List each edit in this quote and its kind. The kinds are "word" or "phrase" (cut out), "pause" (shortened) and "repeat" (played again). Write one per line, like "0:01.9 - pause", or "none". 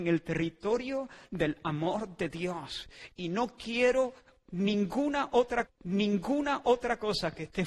0:05.7 - repeat